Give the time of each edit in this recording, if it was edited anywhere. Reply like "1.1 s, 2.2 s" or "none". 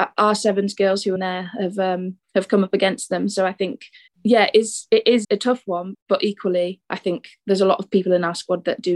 1.2 s, 2.2 s, 4.1 s, 5.2 s, 5.9 s, 6.8 s